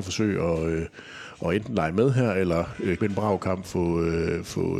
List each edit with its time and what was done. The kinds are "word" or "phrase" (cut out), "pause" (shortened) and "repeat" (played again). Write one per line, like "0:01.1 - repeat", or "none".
0:03.0 - word
0:03.6 - word